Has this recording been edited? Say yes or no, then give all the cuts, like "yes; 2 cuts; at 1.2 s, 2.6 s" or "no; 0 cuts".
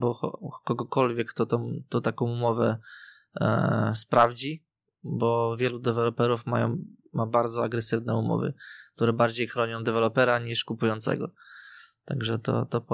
no; 0 cuts